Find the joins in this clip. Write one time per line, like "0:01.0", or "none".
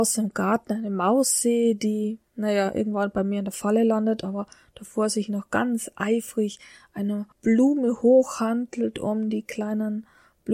0:07.3